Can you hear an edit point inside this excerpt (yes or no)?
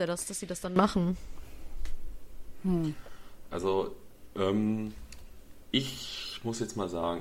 no